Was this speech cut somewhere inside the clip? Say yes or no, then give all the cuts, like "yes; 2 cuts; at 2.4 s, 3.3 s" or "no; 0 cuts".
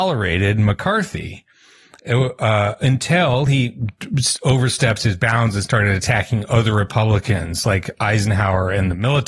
no; 0 cuts